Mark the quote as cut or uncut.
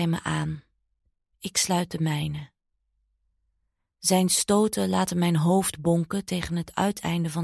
uncut